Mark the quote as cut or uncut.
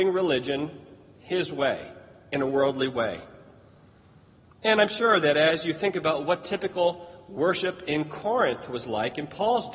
uncut